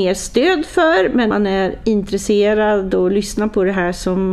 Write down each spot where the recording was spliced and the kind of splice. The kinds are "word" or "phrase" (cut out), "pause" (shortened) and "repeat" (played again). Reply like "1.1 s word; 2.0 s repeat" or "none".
1.3 s word